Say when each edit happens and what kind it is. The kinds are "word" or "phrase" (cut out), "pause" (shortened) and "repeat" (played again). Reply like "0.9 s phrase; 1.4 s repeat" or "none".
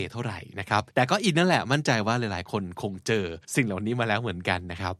0.9 s pause; 3.4 s pause